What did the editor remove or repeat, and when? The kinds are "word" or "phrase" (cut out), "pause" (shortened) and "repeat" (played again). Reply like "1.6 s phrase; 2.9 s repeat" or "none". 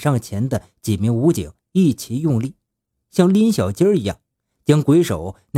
none